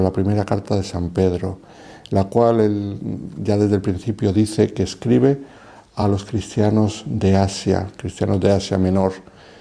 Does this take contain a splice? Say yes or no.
no